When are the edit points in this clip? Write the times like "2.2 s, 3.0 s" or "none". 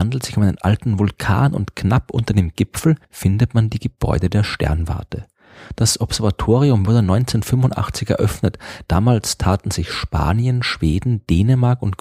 3.0 s